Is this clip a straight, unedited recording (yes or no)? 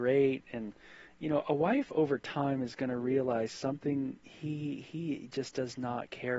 yes